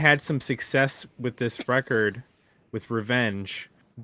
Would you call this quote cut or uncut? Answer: uncut